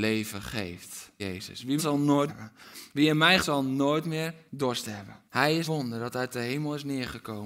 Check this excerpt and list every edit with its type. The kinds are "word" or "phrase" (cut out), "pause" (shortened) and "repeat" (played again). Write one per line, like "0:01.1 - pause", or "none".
0:01.2 - word
0:01.8 - phrase
0:02.3 - phrase
0:03.4 - word
0:04.5 - pause
0:05.3 - pause
0:05.6 - word